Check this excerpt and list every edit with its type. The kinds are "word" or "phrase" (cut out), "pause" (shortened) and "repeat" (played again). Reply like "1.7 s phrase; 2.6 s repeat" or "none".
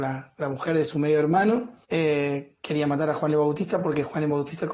1.8 s pause